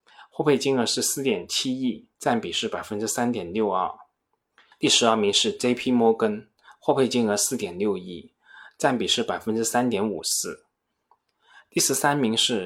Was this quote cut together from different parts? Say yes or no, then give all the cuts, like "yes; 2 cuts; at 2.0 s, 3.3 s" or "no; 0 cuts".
yes; 1 cut; at 2.1 s